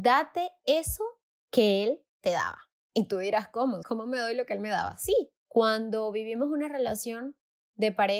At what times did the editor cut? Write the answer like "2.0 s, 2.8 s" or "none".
1.3 s, 2.8 s, 3.8 s, 5.4 s